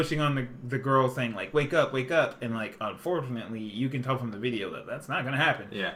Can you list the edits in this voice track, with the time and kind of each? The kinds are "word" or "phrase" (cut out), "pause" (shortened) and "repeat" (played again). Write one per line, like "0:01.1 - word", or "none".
none